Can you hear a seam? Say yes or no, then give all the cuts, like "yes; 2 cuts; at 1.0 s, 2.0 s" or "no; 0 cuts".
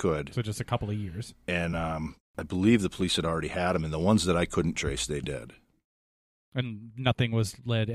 no; 0 cuts